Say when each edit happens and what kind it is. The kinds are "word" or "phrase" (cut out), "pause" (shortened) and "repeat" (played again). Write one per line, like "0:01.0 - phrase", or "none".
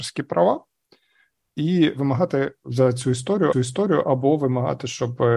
0:02.6 - word
0:03.5 - repeat